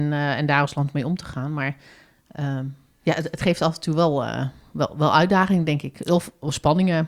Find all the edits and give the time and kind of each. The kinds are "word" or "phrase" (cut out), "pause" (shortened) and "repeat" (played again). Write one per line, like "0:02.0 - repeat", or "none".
none